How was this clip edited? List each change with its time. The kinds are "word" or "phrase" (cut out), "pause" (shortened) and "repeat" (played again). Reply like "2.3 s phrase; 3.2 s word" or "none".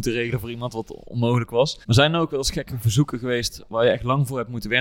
1.8 s pause